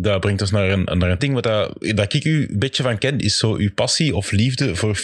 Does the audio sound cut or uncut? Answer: cut